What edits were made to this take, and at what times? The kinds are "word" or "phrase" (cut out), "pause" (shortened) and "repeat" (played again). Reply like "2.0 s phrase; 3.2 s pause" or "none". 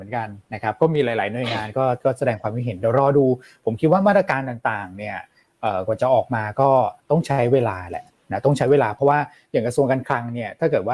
7.0 s pause